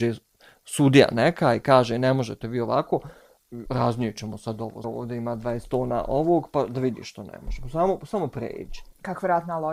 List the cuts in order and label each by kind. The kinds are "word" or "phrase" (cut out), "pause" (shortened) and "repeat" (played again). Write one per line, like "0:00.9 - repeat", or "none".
0:03.7 - phrase
0:04.8 - word